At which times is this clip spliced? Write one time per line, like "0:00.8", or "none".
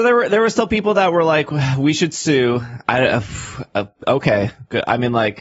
none